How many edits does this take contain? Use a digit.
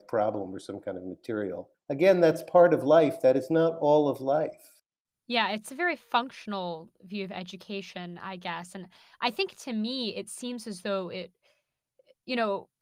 1